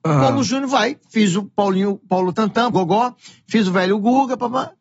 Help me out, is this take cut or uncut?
cut